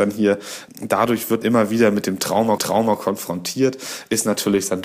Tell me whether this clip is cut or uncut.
cut